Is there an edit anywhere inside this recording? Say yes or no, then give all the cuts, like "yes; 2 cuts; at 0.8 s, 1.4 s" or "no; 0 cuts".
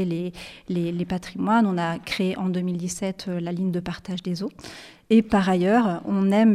no; 0 cuts